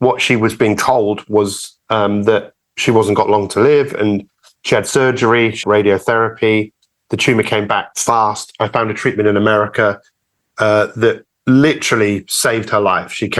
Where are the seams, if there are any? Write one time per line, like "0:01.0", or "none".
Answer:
0:05.6

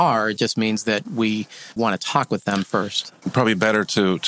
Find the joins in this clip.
0:01.8
0:03.2

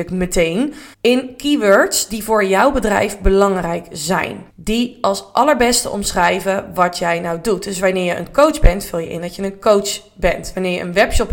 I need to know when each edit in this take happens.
0:00.9
0:04.5

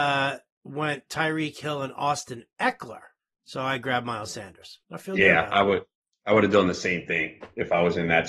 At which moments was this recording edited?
0:03.2
0:04.8

